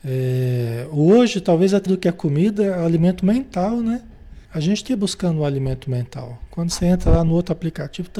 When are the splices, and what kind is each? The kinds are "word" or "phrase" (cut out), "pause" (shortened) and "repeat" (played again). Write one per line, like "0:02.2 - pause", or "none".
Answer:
0:01.9 - word
0:04.4 - pause
0:04.9 - word